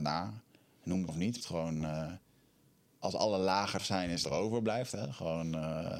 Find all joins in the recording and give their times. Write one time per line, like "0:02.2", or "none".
0:01.1
0:01.4
0:02.8
0:03.8
0:04.2